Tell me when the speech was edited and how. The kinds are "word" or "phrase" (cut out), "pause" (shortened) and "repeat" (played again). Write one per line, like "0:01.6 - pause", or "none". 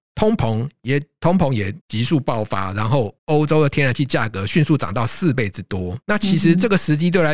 0:01.8 - pause
0:03.2 - pause
0:06.0 - pause